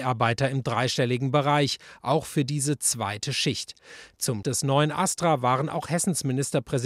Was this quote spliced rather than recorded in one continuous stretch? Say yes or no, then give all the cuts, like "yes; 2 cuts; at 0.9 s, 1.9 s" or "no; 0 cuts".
yes; 1 cut; at 4.4 s